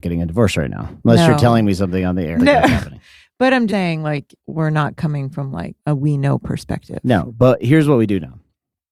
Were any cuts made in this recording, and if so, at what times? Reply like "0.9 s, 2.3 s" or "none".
1.0 s, 2.4 s, 3.7 s, 4.4 s, 5.8 s